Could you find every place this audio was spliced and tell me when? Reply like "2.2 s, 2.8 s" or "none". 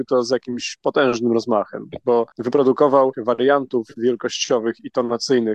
3.1 s